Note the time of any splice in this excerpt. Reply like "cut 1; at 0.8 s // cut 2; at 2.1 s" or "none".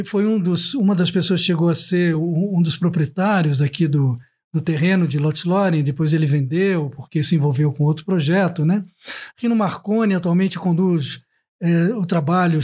none